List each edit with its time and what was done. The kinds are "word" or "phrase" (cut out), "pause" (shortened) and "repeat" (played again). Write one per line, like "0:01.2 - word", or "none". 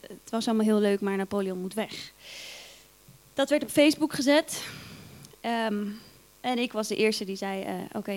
none

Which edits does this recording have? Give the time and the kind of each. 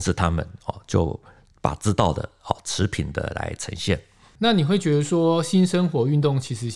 none

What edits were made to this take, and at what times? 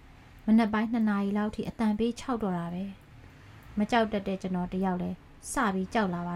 none

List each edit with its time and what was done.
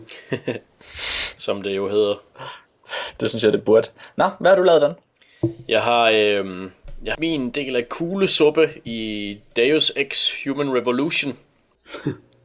0:07.1 - phrase

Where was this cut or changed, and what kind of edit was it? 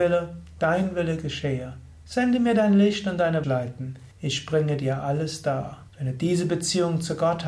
0:03.4 - phrase
0:04.1 - pause
0:05.9 - pause

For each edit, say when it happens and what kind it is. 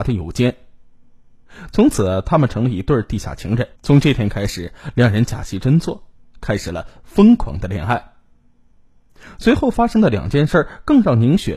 0:03.8 - pause

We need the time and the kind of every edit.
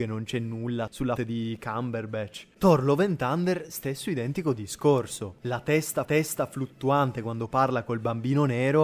0:01.2 - word
0:06.0 - repeat

